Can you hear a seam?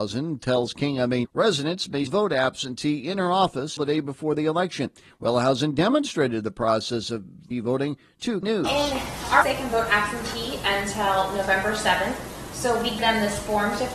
yes; 7 cuts; at 1.2 s, 2.1 s, 3.8 s, 7.5 s, 8.4 s, 9.4 s, 13.0 s

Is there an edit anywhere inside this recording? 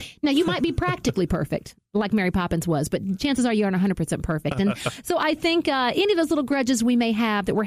no; 0 cuts

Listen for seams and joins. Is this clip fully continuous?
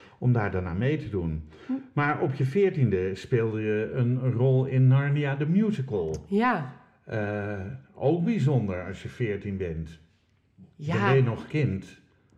no; 1 cut; at 10.7 s

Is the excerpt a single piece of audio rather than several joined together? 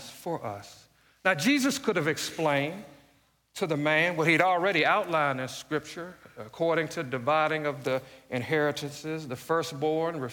yes; 0 cuts

